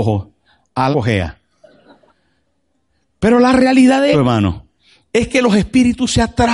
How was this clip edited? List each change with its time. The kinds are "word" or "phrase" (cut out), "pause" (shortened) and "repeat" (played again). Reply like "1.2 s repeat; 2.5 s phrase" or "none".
0.9 s word; 2.1 s pause; 4.1 s word